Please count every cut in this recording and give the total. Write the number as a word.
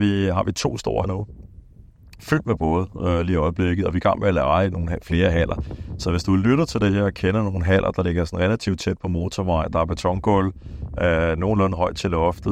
one